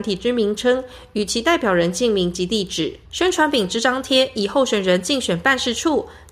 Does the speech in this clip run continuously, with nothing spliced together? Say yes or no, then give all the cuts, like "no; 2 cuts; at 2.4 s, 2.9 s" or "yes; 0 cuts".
no; 1 cut; at 3.0 s